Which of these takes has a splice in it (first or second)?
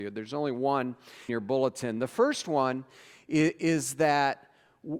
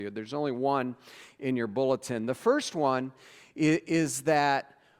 first